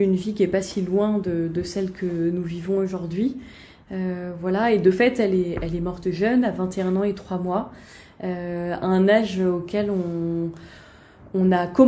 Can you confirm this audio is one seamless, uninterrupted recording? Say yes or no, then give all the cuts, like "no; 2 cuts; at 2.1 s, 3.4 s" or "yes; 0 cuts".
yes; 0 cuts